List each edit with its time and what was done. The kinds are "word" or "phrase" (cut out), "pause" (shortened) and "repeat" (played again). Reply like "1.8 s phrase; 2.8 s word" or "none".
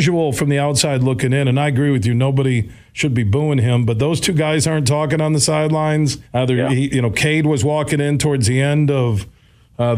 6.2 s pause